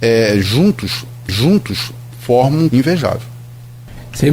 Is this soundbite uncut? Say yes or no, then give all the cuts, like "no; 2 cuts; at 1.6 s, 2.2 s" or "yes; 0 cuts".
no; 2 cuts; at 1.3 s, 2.7 s